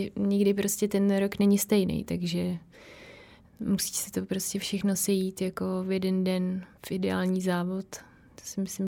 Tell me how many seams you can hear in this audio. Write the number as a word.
zero